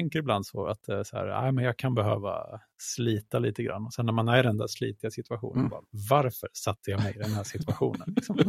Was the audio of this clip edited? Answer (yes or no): no